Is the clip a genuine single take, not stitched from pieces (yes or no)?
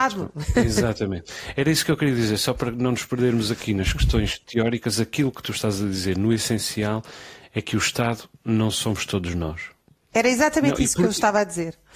yes